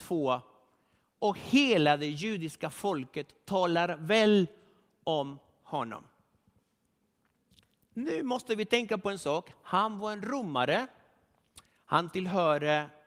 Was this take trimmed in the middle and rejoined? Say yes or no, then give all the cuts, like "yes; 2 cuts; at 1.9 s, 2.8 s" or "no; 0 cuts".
no; 0 cuts